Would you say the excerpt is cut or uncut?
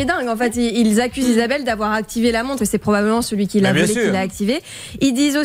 cut